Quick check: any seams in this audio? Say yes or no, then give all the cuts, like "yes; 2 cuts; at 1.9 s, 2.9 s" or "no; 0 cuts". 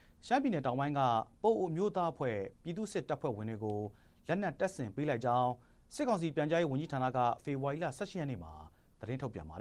yes; 1 cut; at 2.5 s